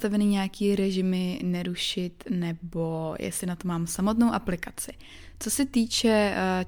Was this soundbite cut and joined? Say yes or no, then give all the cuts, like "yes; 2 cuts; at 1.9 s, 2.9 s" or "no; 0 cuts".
no; 0 cuts